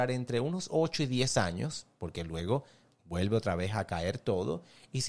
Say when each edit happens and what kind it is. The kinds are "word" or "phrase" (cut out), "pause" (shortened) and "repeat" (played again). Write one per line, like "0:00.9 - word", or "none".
none